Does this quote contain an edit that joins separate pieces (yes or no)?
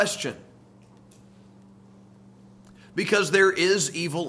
no